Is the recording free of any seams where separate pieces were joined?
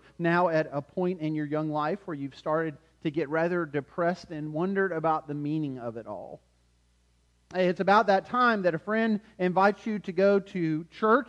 yes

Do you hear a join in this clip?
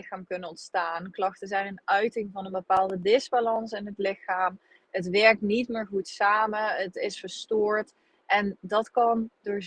no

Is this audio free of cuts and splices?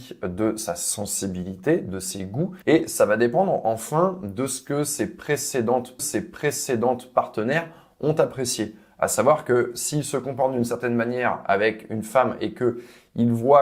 no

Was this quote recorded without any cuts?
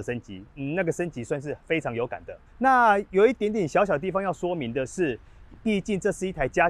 no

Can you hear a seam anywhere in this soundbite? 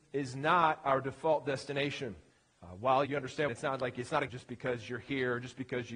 yes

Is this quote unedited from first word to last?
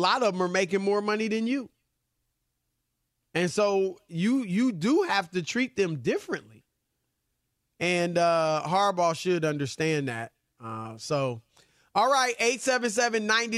yes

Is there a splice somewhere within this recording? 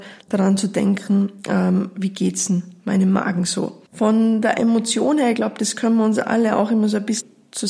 yes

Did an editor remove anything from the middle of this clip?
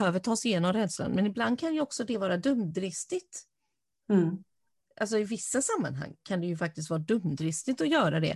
no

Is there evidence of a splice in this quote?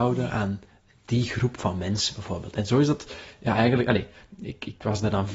no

